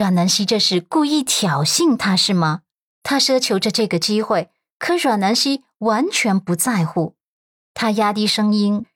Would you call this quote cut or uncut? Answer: uncut